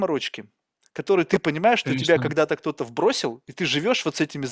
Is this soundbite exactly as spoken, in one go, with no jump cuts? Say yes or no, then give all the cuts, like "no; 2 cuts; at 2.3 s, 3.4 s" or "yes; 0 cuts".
yes; 0 cuts